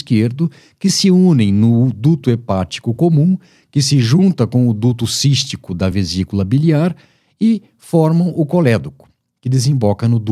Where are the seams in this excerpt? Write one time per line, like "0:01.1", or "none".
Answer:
none